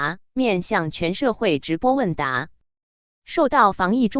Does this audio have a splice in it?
no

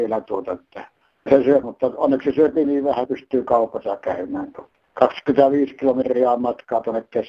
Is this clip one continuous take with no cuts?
no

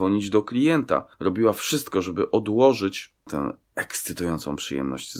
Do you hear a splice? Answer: no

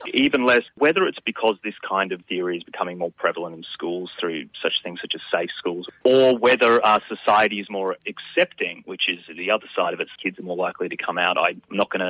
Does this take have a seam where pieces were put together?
yes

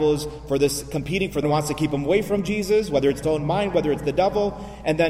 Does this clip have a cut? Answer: yes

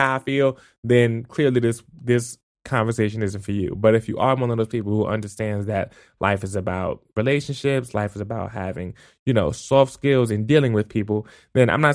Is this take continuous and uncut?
yes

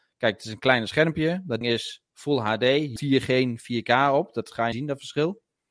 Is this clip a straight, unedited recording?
no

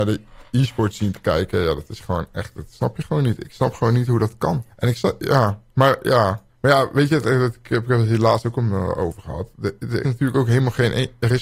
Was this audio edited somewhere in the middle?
yes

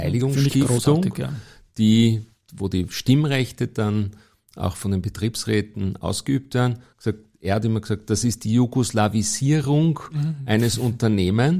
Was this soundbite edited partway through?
no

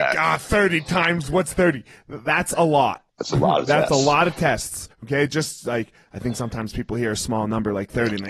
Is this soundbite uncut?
no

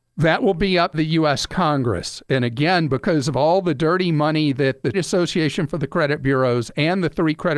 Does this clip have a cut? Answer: yes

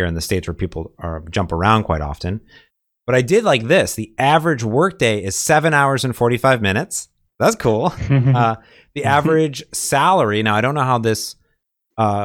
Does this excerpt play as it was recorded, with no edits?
yes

